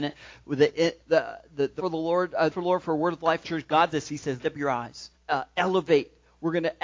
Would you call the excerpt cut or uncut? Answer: cut